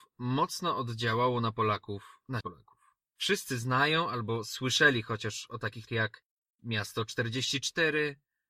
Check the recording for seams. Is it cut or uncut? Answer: cut